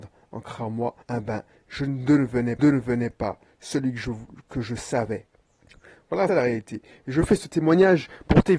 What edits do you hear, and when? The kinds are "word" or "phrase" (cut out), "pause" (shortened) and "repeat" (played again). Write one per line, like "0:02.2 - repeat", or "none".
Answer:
0:01.0 - pause
0:02.6 - repeat
0:06.3 - word